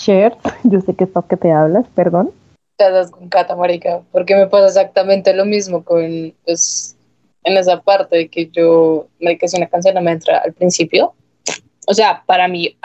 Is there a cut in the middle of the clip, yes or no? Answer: yes